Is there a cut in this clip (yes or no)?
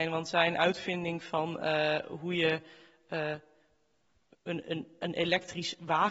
no